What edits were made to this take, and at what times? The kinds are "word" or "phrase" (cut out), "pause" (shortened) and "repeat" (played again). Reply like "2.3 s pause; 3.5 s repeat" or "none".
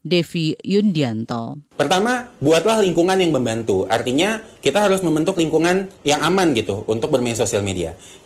1.7 s pause; 6.0 s pause